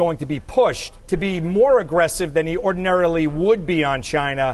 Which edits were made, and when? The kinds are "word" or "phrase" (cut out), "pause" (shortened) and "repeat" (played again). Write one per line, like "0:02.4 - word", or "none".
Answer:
0:01.0 - pause